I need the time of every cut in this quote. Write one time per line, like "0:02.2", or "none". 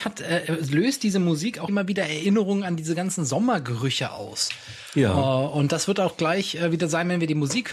0:01.7